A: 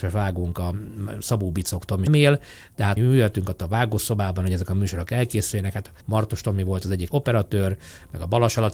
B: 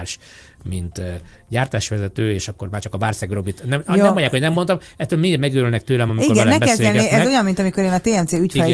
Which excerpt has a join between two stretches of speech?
A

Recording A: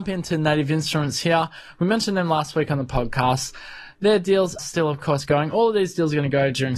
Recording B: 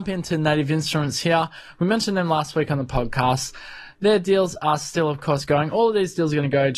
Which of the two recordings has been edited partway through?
A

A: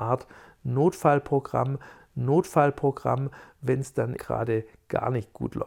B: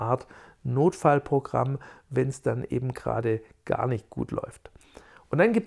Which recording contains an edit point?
A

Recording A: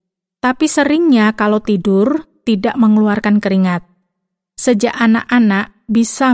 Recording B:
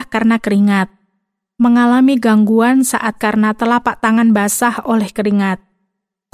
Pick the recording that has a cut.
B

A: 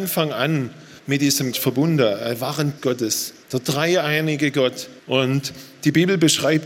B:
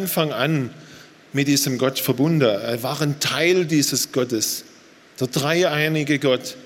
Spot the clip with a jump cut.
A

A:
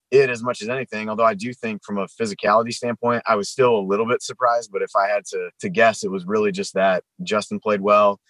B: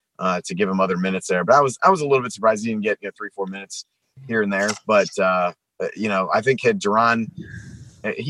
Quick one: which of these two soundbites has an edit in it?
A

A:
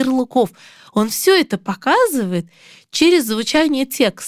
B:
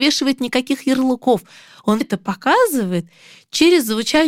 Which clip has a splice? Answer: B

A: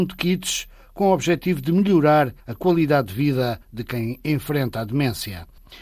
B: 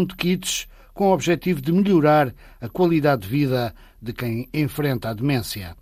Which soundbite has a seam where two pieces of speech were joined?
A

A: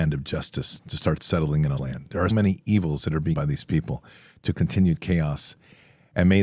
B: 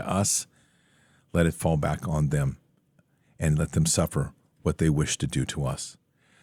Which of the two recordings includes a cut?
A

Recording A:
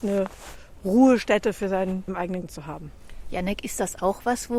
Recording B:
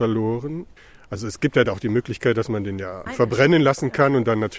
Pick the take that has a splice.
A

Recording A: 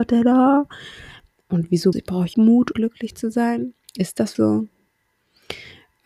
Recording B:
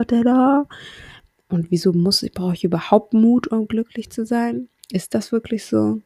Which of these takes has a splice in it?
A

